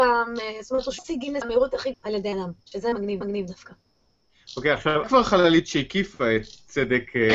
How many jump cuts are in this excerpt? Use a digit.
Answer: 6